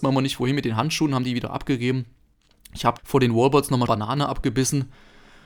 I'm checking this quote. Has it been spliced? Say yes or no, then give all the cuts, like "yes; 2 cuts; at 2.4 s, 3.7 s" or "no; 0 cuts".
yes; 2 cuts; at 3.0 s, 3.9 s